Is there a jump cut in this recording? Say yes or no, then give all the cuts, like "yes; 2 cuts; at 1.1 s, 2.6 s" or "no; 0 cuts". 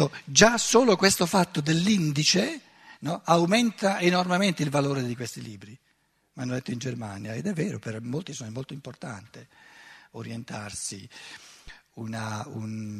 no; 0 cuts